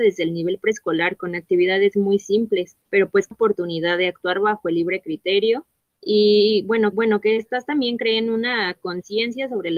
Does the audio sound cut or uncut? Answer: cut